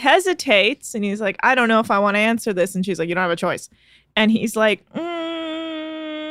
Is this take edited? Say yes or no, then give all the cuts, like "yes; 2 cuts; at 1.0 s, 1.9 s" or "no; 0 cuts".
no; 0 cuts